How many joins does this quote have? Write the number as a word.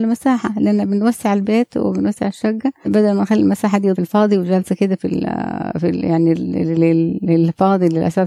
two